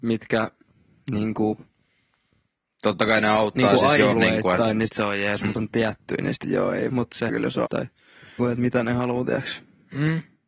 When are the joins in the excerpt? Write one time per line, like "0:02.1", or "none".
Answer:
0:04.1
0:04.9
0:05.5
0:06.4
0:06.9
0:07.3
0:07.7
0:08.4